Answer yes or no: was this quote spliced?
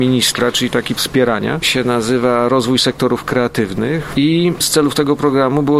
yes